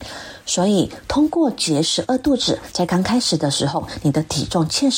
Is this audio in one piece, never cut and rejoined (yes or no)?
yes